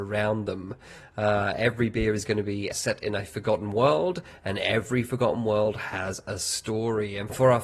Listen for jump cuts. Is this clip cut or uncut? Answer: cut